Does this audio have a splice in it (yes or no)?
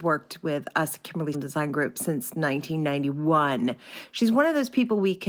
yes